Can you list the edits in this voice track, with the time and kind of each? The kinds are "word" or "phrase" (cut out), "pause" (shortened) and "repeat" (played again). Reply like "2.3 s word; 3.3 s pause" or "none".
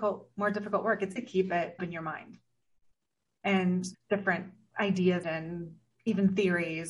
1.2 s word; 1.8 s word; 3.9 s word; 5.2 s word